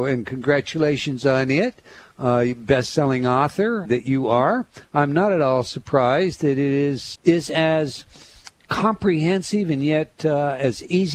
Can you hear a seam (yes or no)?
yes